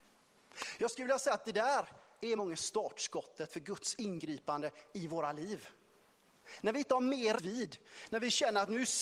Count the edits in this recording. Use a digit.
2